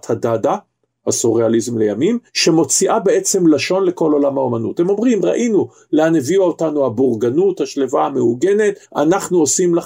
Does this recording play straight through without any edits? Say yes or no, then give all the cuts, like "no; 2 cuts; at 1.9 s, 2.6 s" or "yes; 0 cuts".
no; 2 cuts; at 2.3 s, 8.8 s